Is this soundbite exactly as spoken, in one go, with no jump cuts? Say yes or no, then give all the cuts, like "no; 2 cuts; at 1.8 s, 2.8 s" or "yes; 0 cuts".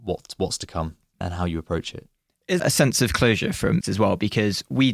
no; 3 cuts; at 1.2 s, 2.6 s, 3.8 s